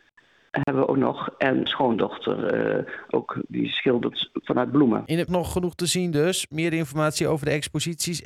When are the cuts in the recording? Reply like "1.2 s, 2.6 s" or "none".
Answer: 1.7 s, 3.1 s, 4.4 s, 5.3 s